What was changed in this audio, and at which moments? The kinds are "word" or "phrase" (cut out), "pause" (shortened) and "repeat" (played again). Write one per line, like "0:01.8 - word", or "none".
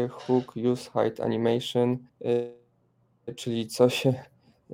0:02.1 - pause